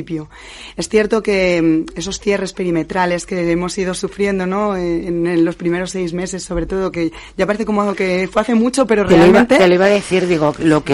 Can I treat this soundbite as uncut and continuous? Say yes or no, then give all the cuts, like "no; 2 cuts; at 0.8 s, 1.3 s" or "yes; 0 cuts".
yes; 0 cuts